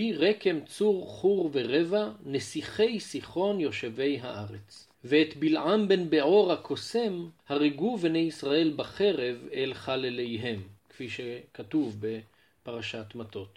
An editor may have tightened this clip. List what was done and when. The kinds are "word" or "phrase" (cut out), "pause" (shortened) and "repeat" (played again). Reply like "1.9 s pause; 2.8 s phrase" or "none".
4.9 s pause; 7.4 s pause; 10.8 s pause

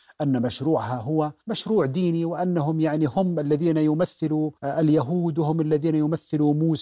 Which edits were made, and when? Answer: 1.4 s pause; 4.6 s pause

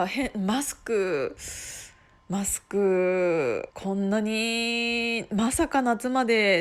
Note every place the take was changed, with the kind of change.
3.7 s pause

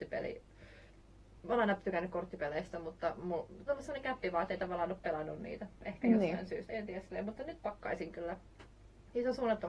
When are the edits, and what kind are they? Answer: 3.7 s phrase; 6.7 s word

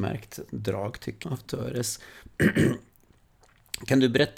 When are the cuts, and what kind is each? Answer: 1.2 s word

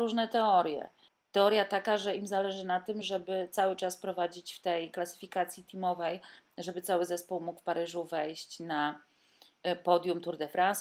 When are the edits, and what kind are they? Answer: none

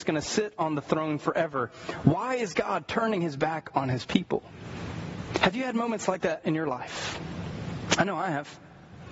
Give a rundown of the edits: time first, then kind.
none

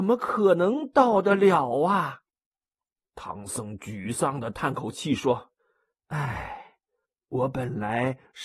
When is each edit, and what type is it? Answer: 2.3 s pause; 5.6 s pause

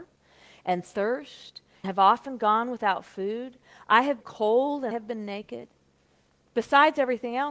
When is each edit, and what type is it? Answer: 1.8 s word; 4.2 s word; 4.9 s word

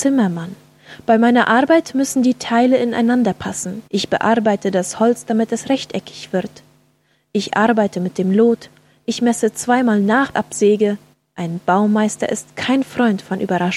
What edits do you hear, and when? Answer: 3.9 s pause; 10.3 s phrase; 11.1 s pause

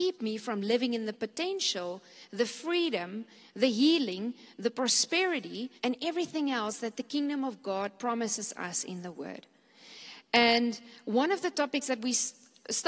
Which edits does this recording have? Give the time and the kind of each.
5.8 s pause

